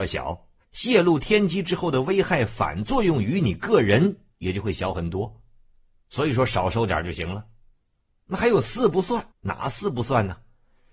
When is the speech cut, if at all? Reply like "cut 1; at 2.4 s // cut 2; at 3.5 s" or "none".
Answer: cut 1; at 9.3 s